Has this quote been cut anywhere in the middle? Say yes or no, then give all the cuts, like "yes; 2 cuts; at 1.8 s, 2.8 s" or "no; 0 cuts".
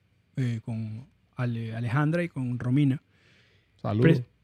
no; 0 cuts